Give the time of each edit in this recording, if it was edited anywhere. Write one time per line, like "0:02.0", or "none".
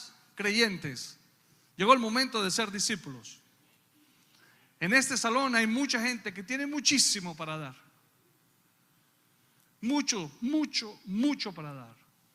none

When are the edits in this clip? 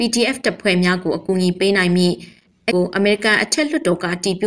0:02.7

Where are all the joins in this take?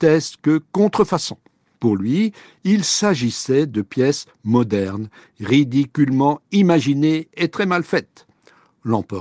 none

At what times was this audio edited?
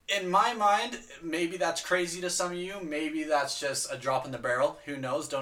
none

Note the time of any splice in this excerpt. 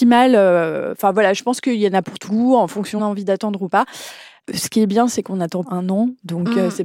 0:02.3
0:03.0
0:05.6

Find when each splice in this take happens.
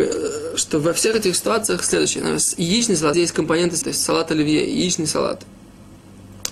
0:03.1
0:03.8

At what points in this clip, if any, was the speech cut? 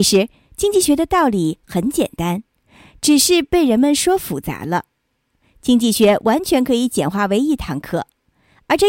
none

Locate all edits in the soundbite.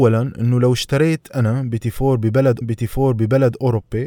0:02.6

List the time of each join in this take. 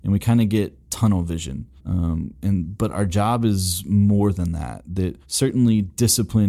0:01.8
0:05.2

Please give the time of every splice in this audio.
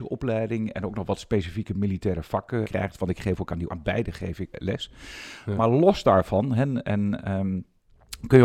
0:02.6
0:03.7
0:04.5

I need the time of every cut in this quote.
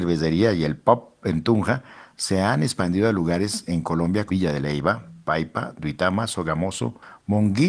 0:04.3

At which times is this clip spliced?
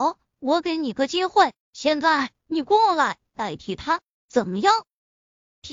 0:01.6

